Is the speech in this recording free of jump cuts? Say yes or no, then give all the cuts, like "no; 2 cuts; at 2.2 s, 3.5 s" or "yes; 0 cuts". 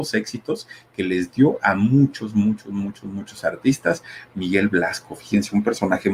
yes; 0 cuts